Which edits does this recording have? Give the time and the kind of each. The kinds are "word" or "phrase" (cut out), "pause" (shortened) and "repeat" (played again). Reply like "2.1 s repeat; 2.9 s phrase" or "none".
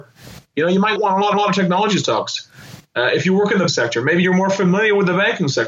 1.0 s word; 1.3 s repeat; 3.7 s word